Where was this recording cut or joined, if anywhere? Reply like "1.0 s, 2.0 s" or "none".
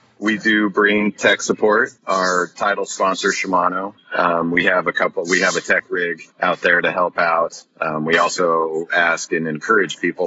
2.0 s, 4.0 s, 6.3 s